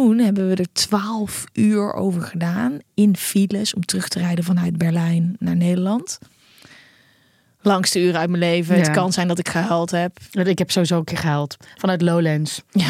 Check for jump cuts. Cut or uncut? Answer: uncut